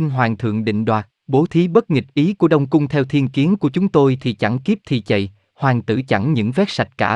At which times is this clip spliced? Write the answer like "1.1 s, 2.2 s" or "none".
1.2 s